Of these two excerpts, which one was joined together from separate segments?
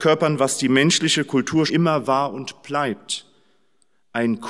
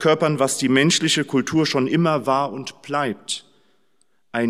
first; 1 cut; at 1.7 s

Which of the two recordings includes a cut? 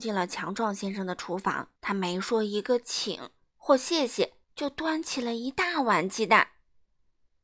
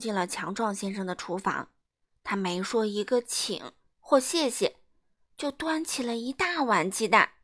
first; 2 cuts; at 1.8 s, 4.4 s

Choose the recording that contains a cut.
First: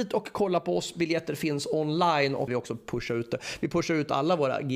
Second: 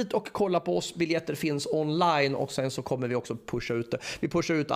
first; 1 cut; at 2.5 s

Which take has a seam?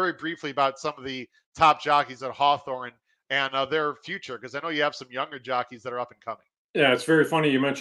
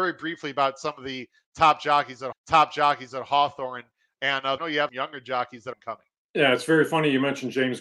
second; 4 cuts; at 2.3 s, 4.6 s, 4.9 s, 5.7 s

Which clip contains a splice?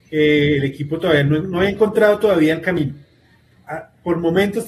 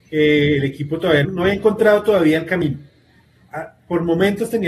second; 1 cut; at 1.2 s

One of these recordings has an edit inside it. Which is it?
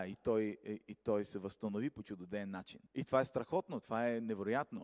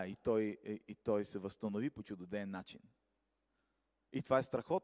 first; 1 cut; at 2.9 s

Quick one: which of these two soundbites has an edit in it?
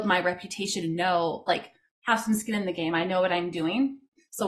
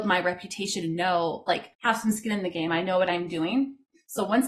second; 1 cut; at 1.7 s

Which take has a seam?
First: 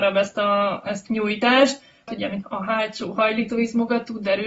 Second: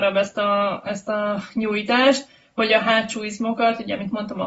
first; 3 cuts; at 1.1 s, 2.1 s, 2.4 s

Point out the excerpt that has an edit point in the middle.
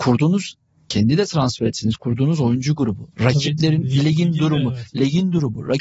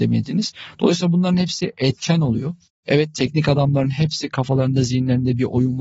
first; 1 cut; at 3.1 s

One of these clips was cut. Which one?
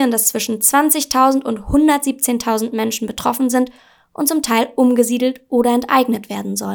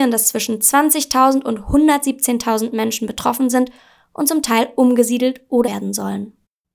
second; 1 cut; at 5.6 s

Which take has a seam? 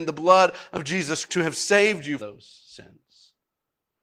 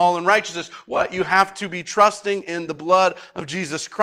first; 2 cuts; at 1.3 s, 2.2 s

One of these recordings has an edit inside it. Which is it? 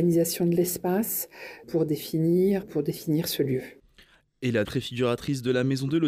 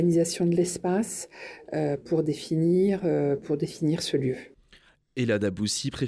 first; 3 cuts; at 1.6 s, 2.6 s, 4.6 s

